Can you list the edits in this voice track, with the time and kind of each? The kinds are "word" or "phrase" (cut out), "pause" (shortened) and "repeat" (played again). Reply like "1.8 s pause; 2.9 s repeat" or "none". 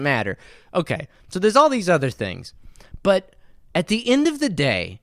none